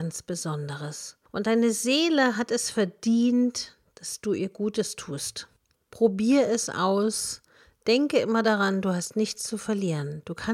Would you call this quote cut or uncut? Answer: uncut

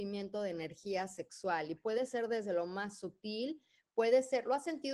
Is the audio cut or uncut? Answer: uncut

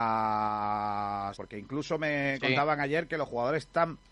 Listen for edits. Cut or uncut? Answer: cut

